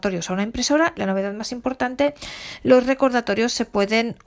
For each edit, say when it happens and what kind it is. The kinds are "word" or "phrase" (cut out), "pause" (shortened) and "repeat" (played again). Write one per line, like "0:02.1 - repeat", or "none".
0:00.9 - word